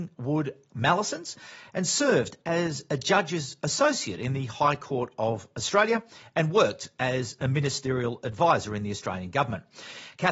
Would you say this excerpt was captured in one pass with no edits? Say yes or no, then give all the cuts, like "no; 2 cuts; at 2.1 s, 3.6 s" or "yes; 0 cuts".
yes; 0 cuts